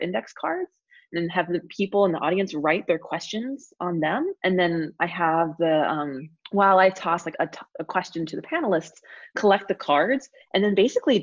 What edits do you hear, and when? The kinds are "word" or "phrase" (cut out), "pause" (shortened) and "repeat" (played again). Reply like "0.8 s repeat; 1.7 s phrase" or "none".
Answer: 4.4 s pause; 6.4 s pause; 7.3 s word